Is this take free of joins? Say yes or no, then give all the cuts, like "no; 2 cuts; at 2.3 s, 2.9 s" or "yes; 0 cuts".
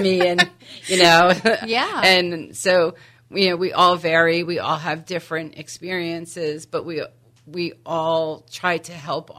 yes; 0 cuts